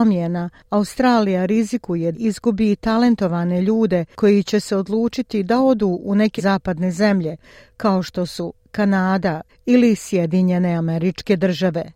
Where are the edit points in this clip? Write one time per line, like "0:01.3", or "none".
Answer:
0:02.1
0:06.4
0:09.5